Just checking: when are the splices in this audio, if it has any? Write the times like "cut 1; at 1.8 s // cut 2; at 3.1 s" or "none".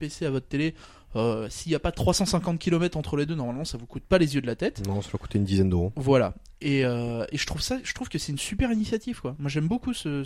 none